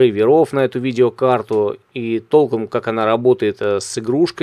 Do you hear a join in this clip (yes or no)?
no